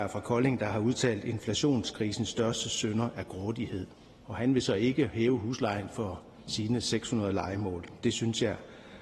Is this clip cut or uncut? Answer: uncut